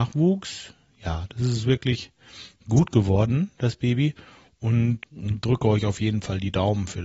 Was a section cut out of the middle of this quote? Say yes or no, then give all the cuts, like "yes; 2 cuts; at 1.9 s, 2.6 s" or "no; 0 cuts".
yes; 1 cut; at 5.0 s